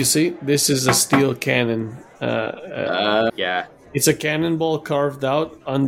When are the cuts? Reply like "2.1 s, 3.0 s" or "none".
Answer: 3.3 s